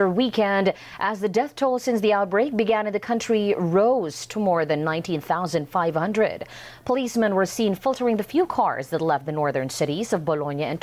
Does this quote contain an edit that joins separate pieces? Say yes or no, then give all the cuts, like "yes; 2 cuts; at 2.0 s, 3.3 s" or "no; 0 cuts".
no; 0 cuts